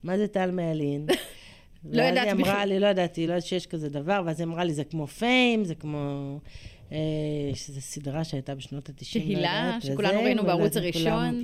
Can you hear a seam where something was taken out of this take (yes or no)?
no